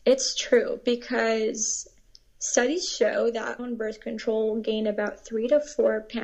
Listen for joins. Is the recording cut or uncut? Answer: cut